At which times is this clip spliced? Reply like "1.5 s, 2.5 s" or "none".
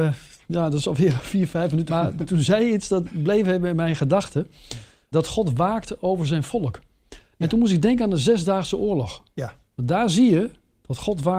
1.9 s, 5.1 s